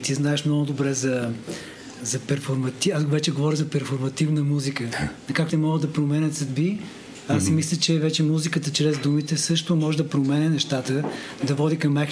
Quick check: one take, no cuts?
no; 2 cuts; at 2.0 s, 5.5 s

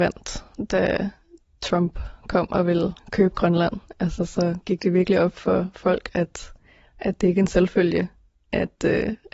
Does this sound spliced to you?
no; 0 cuts

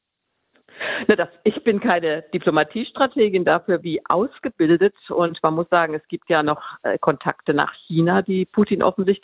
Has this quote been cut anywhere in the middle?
yes; 1 cut; at 3.8 s

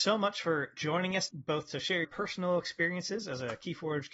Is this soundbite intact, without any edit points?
no; 2 cuts; at 1.3 s, 2.0 s

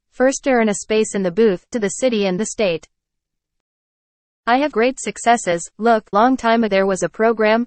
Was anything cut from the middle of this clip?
yes; 5 cuts; at 1.7 s, 2.4 s, 4.7 s, 6.1 s, 6.7 s

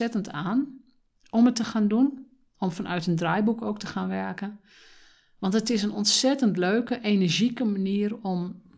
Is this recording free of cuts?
yes; 0 cuts

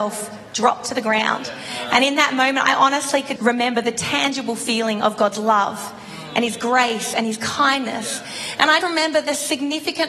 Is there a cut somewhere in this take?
yes; 2 cuts; at 3.4 s, 8.8 s

